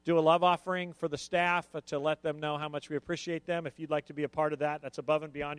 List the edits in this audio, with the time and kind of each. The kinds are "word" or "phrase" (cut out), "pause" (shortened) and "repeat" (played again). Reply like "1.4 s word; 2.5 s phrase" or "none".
none